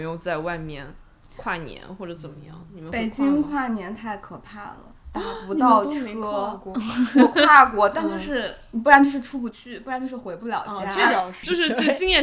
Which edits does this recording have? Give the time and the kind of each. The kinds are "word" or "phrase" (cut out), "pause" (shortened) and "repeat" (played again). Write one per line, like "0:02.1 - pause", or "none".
none

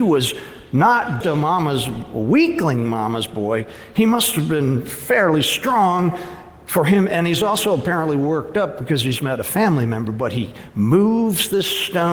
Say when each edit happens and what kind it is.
0:01.2 - word

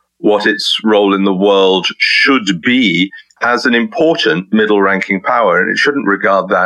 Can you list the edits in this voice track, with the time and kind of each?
0:03.3 - pause

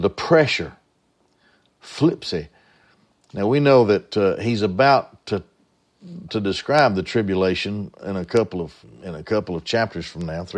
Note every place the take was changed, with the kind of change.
0:06.3 - phrase
0:08.8 - word

